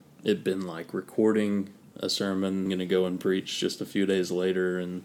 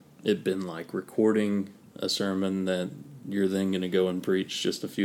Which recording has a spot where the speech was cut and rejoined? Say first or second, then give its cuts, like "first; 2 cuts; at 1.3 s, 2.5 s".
first; 1 cut; at 2.7 s